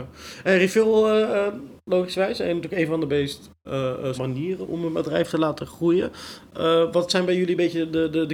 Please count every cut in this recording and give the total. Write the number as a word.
three